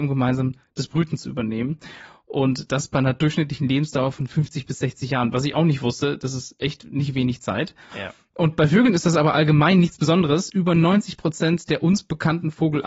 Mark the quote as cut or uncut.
uncut